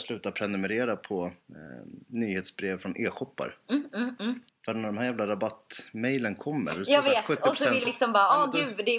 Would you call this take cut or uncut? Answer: cut